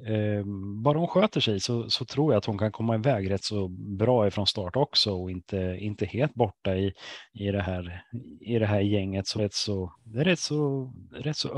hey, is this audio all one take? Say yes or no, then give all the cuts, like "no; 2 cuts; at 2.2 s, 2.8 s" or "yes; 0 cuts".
no; 2 cuts; at 9.4 s, 9.9 s